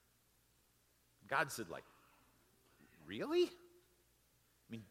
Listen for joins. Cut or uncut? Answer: uncut